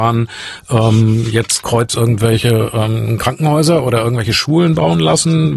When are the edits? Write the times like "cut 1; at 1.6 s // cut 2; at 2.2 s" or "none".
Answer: cut 1; at 1.6 s